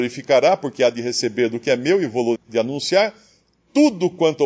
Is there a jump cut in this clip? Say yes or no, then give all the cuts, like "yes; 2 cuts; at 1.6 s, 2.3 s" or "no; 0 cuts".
yes; 1 cut; at 2.4 s